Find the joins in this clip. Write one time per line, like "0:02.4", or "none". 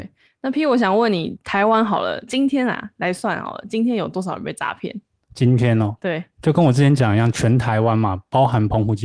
none